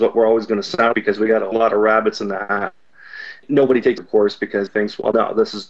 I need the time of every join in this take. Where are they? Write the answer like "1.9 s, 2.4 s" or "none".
0.9 s, 1.5 s, 4.0 s, 4.7 s